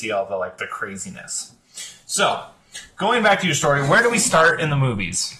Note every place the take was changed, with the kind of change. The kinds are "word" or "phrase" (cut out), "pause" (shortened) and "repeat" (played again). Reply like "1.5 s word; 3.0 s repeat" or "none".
none